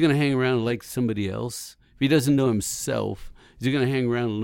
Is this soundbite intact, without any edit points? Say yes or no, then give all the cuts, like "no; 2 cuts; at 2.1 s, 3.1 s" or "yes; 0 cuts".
yes; 0 cuts